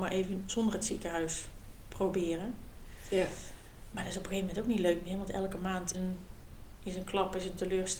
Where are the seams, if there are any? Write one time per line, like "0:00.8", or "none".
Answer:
0:05.9